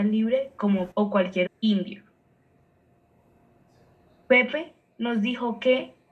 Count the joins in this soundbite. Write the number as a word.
two